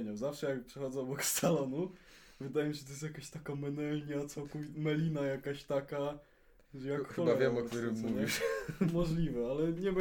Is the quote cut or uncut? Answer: uncut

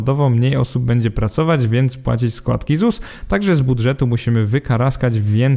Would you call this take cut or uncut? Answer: uncut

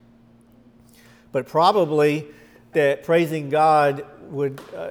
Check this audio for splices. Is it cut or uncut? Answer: cut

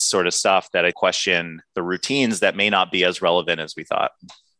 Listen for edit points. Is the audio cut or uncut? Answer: cut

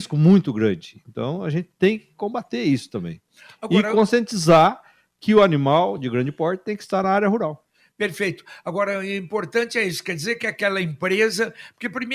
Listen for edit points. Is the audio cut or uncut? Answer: uncut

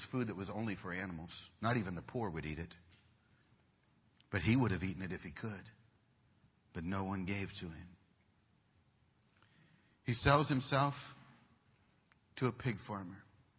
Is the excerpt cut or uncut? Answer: uncut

